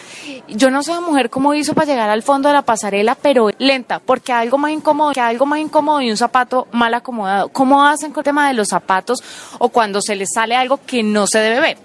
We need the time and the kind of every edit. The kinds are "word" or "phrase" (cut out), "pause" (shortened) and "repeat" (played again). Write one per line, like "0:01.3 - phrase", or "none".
0:03.5 - phrase
0:05.1 - repeat
0:08.2 - word